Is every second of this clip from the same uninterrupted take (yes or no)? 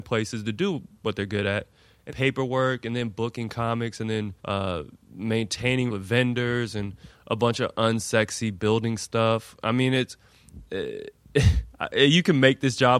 no